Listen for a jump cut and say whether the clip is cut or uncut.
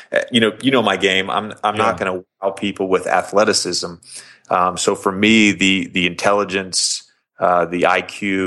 uncut